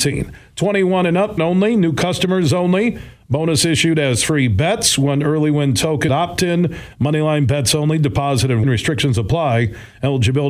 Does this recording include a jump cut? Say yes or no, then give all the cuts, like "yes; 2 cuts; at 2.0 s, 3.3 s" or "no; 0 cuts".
yes; 3 cuts; at 1.4 s, 6.1 s, 8.6 s